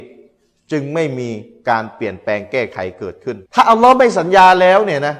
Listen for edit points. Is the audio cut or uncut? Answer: cut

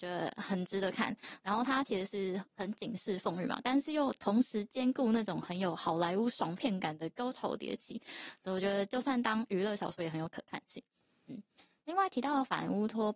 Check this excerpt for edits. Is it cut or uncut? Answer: uncut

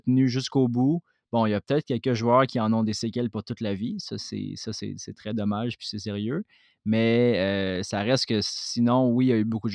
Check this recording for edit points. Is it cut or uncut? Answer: uncut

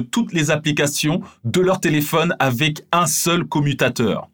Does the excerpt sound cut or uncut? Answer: uncut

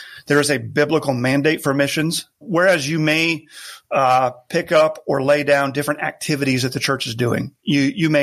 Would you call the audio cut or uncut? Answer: cut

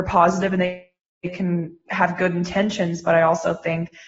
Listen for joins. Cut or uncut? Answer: cut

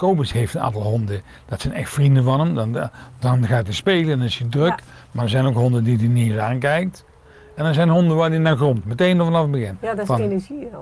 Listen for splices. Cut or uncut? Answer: uncut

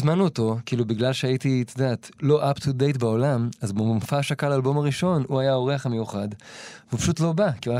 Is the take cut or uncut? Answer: uncut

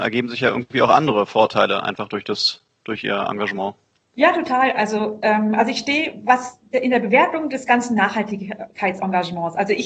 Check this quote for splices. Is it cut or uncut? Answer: uncut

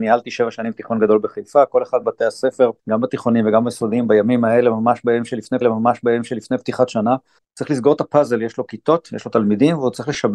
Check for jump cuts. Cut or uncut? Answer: cut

